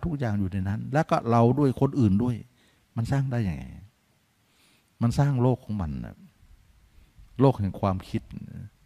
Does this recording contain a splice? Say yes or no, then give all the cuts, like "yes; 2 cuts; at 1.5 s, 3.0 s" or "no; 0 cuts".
no; 0 cuts